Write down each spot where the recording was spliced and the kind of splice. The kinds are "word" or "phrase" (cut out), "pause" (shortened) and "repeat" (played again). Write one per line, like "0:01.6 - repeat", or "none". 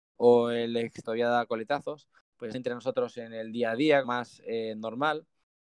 0:01.0 - phrase
0:02.5 - word
0:04.0 - phrase